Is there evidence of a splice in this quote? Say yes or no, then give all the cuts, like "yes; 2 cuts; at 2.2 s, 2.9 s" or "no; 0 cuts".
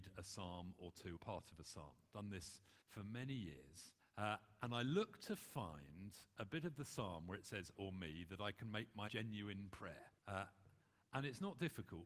yes; 6 cuts; at 1.2 s, 2.8 s, 4.0 s, 7.7 s, 9.1 s, 10.2 s